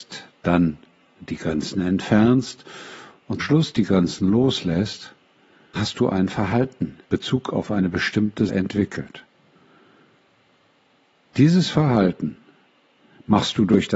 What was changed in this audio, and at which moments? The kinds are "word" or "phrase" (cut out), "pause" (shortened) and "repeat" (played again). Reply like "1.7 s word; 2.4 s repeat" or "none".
3.4 s word; 5.8 s word; 7.1 s word; 8.5 s word